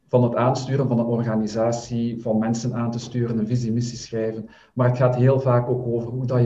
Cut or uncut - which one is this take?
uncut